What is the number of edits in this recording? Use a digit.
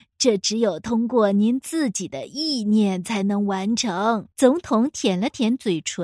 1